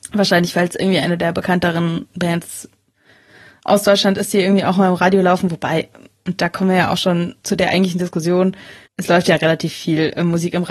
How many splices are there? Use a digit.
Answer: 1